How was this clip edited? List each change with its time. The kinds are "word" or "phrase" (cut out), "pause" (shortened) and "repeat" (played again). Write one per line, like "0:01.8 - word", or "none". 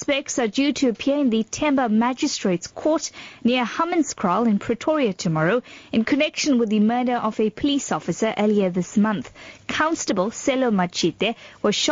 none

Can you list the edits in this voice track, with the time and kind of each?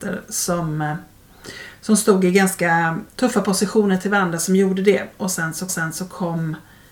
0:03.1 - pause
0:05.7 - repeat

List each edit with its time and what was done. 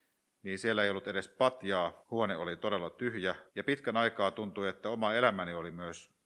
0:02.0 - pause
0:03.5 - pause

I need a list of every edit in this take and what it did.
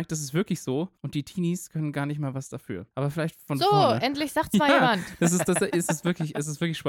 0:01.0 - pause
0:02.9 - pause

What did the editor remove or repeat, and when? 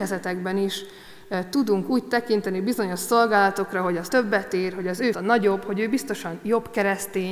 0:04.1 - word
0:05.1 - word

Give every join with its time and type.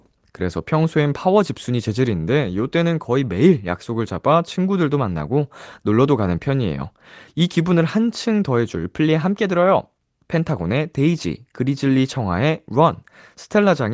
none

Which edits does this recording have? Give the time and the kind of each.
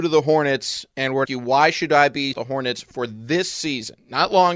0:01.2 - phrase
0:02.3 - phrase

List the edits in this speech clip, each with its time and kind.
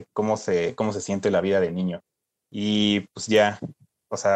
0:02.2 - pause

